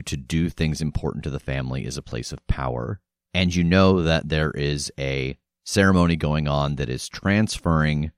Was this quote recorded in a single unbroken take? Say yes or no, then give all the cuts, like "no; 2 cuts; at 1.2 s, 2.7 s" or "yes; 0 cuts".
yes; 0 cuts